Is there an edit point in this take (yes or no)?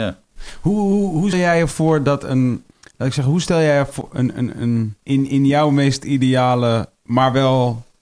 yes